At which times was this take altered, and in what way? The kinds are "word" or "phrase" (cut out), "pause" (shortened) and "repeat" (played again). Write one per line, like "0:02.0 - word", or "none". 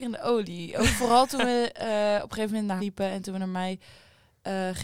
0:02.8 - word